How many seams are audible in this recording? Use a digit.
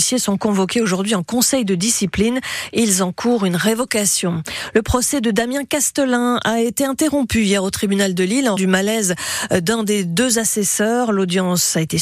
1